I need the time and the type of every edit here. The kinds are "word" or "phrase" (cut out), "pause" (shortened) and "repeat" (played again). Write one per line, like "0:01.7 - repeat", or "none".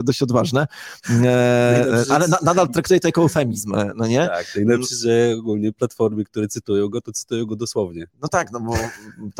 none